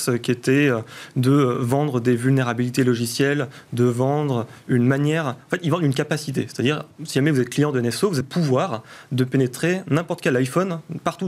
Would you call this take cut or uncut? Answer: cut